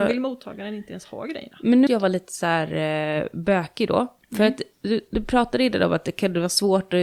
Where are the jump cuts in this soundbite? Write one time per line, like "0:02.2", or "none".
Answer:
0:01.9
0:05.1